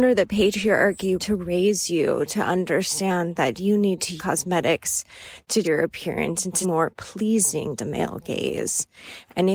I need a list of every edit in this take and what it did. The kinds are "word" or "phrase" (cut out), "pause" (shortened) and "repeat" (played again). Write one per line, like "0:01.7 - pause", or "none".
0:01.2 - word
0:04.2 - word
0:05.6 - word
0:06.6 - word
0:07.8 - word